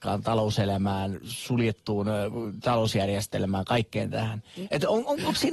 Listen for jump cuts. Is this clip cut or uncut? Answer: uncut